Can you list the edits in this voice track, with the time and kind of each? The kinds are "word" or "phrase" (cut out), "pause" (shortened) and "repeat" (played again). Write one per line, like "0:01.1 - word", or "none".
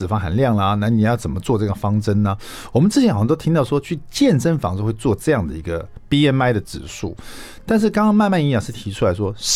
none